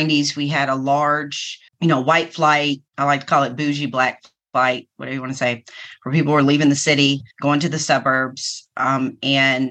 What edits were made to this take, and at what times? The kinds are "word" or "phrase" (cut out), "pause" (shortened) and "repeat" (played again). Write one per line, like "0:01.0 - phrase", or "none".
0:01.7 - pause
0:02.9 - pause
0:07.3 - pause